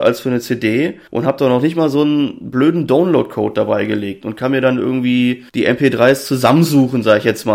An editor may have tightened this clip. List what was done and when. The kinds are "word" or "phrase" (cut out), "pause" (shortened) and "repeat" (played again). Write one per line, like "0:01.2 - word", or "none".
0:01.1 - pause
0:05.5 - pause